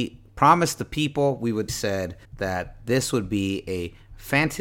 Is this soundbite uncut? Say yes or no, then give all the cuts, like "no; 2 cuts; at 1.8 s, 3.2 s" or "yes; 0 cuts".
no; 2 cuts; at 1.7 s, 2.2 s